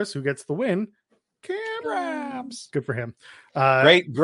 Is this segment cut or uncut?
cut